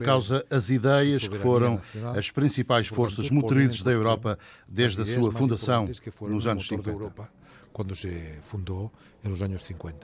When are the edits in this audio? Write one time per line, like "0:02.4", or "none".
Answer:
none